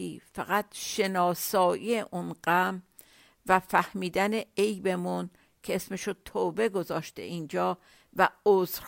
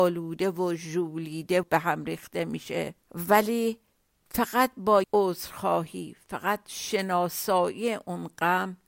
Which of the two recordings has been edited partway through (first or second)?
second